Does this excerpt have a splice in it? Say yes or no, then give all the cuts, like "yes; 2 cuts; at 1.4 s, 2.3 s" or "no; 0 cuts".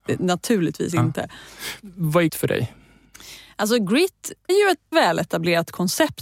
yes; 3 cuts; at 2.3 s, 4.5 s, 4.9 s